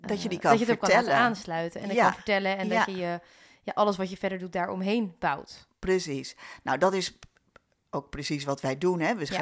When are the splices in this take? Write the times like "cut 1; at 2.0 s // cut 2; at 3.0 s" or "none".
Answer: none